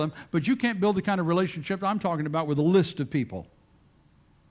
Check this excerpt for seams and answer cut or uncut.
uncut